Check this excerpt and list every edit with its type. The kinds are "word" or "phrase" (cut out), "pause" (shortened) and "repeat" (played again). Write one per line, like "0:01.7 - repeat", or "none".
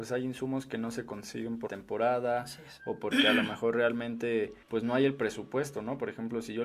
0:01.7 - word
0:04.6 - pause

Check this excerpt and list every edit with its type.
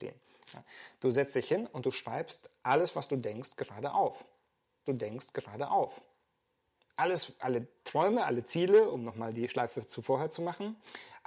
0:04.9 - repeat

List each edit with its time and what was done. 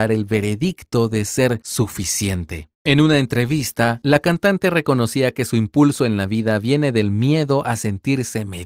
0:02.7 - pause

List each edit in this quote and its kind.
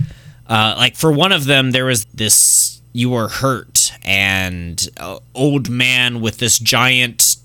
0:02.0 - word

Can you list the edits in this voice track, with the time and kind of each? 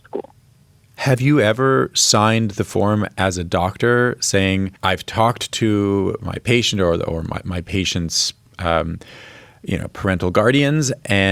0:04.8 - pause

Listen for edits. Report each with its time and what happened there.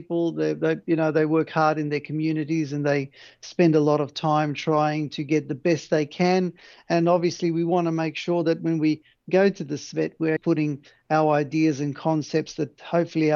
0:10.4 - word

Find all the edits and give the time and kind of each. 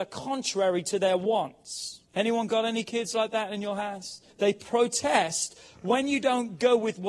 0:02.1 - pause
0:04.3 - pause

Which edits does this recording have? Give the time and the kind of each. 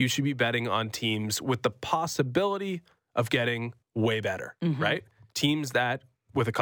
0:03.8 - pause

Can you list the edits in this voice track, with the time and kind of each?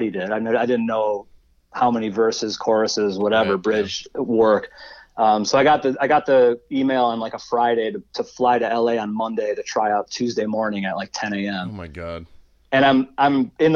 none

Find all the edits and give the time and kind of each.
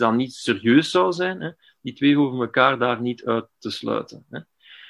none

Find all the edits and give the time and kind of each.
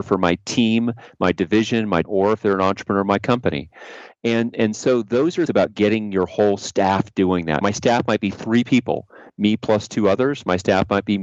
0:02.0 - word
0:04.5 - word
0:05.5 - word
0:07.6 - word

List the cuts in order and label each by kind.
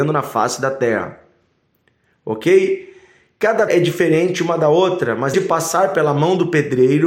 0:03.7 - word
0:05.3 - word

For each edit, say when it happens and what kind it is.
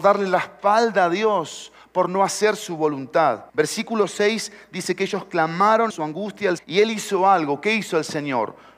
0:03.5 - pause
0:05.9 - word
0:06.6 - word

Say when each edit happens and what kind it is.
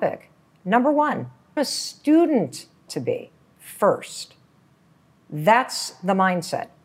0:01.6 - word
0:02.9 - phrase

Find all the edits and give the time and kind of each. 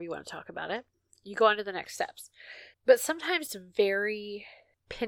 0:02.7 - pause
0:03.5 - word

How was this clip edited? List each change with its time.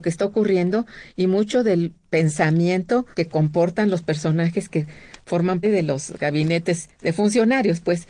0:03.1 - pause
0:05.6 - word

